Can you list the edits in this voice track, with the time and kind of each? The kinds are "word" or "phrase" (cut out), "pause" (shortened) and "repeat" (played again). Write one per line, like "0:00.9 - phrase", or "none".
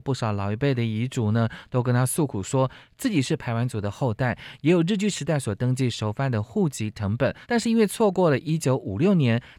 0:07.4 - pause

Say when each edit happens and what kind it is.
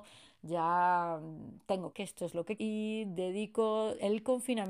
0:01.9 - word
0:02.6 - word

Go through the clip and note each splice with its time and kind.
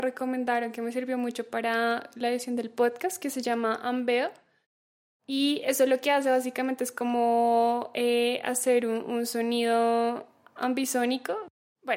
none

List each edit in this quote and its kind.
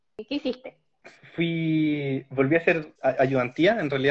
0:02.9 - word

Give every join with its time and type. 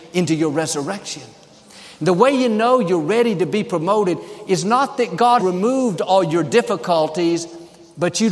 0:05.4 - word

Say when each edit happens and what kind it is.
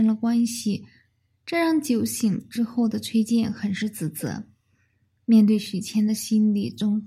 none

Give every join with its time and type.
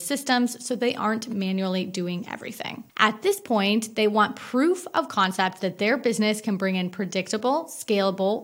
0:02.9 - pause

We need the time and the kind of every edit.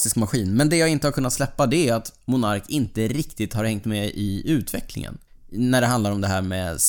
0:05.3 - pause

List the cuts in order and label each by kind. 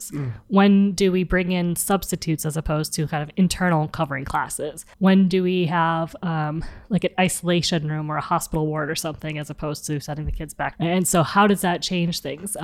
0:04.9 - pause
0:10.7 - phrase

